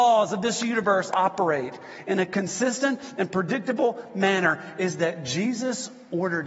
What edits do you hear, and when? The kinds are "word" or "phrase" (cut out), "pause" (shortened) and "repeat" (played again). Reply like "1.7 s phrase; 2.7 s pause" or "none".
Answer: none

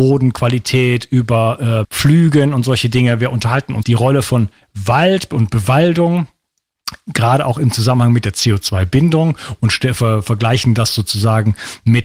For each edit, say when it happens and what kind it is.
1.8 s word; 3.8 s word

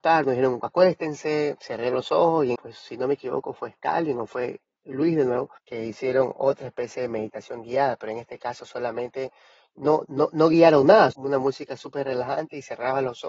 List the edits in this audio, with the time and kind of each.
2.5 s phrase; 5.6 s pause; 10.0 s word; 11.1 s phrase

